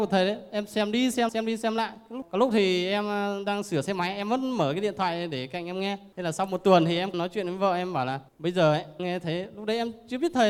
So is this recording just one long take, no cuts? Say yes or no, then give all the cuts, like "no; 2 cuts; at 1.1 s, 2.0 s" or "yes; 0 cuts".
no; 4 cuts; at 1.3 s, 7.1 s, 8.3 s, 9.0 s